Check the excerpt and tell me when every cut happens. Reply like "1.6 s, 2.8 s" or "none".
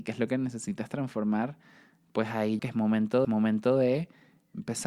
2.6 s, 3.2 s